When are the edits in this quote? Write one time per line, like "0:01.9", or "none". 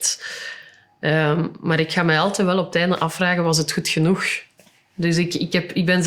none